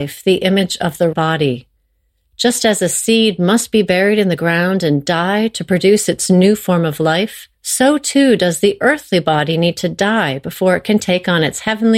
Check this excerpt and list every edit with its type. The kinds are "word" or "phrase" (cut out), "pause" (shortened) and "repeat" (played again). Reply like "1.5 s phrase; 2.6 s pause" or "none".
1.1 s word; 7.5 s pause